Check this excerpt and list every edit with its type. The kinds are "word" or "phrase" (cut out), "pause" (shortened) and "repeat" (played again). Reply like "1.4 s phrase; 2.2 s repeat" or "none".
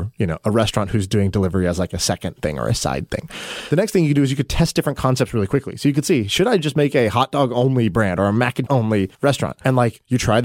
8.7 s word; 9.1 s pause